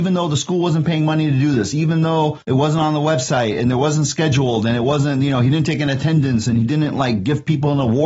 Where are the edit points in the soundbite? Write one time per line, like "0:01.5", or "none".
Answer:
0:02.4

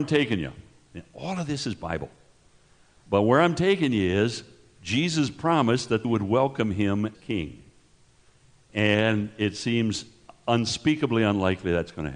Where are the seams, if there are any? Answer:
0:06.0
0:07.1

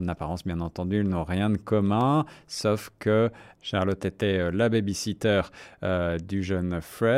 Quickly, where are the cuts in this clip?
none

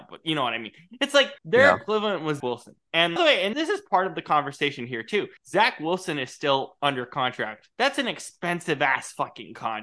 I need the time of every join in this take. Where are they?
0:01.4
0:02.4
0:03.2
0:03.5
0:05.4

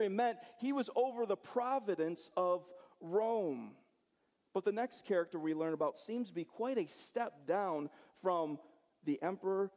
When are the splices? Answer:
none

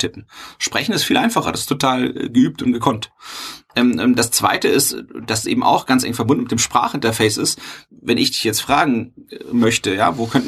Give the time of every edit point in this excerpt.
none

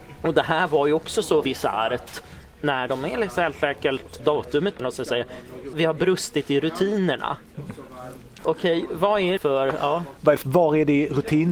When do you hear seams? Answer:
0:01.4
0:04.2
0:04.8
0:05.7
0:09.4
0:10.4

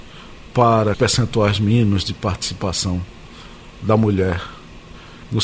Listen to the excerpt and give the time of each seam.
0:00.9

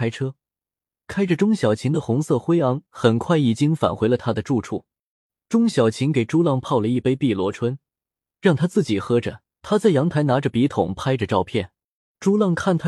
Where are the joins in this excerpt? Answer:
0:09.5

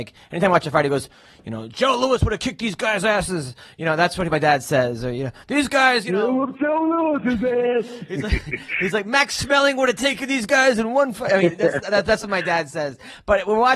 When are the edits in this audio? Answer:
none

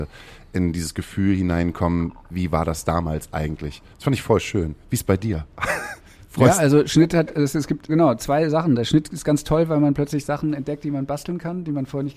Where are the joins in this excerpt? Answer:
0:03.9
0:07.9

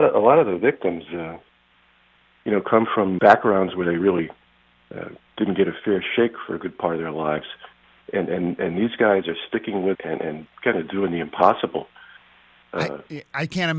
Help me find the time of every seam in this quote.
0:03.2
0:09.9

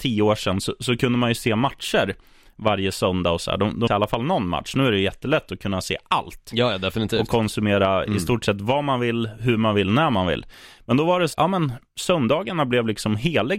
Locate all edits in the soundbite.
0:03.9
0:11.3

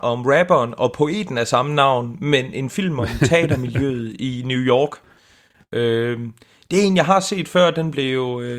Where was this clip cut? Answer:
none

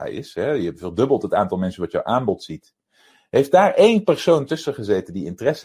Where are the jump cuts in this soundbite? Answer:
none

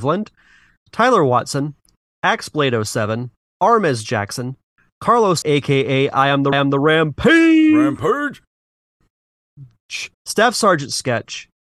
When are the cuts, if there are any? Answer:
0:03.4
0:05.4
0:06.5
0:10.1

